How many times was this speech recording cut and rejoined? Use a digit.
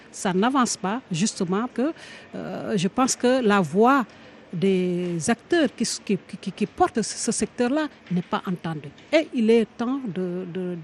2